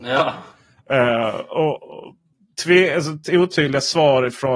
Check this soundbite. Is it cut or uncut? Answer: uncut